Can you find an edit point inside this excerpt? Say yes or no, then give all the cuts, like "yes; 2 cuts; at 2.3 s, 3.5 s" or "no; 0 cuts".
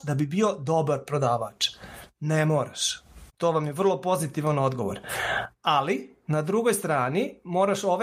yes; 1 cut; at 3.3 s